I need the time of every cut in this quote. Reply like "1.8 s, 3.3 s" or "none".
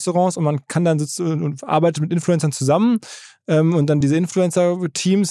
none